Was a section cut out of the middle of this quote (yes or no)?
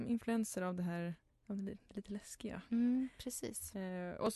yes